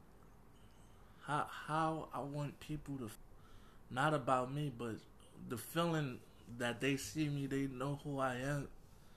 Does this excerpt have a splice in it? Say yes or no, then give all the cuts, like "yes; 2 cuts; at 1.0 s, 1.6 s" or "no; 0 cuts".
no; 0 cuts